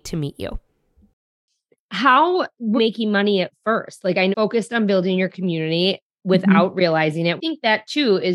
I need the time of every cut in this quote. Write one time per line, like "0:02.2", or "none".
0:02.8
0:04.3
0:07.4

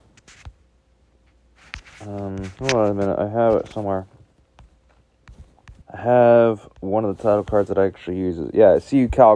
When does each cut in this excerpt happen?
0:02.5
0:05.8

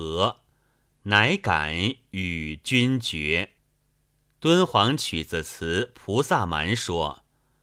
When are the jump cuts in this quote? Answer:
0:03.6

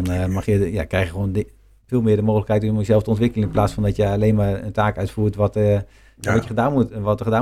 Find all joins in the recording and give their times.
none

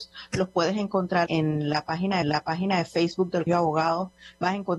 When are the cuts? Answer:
0:01.3
0:02.2
0:03.5

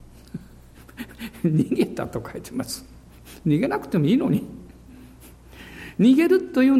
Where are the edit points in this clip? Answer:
none

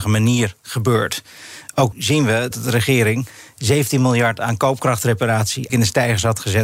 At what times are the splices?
0:01.9
0:02.5
0:05.7

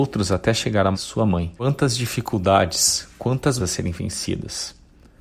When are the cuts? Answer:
0:00.9
0:01.6
0:03.6

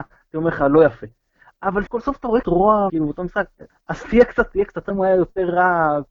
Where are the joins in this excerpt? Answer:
0:01.9
0:02.4
0:02.9
0:03.7
0:04.5
0:04.9

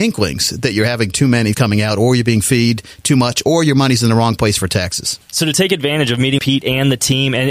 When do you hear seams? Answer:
0:01.5
0:06.4

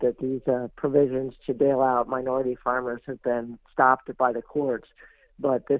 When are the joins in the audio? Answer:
none

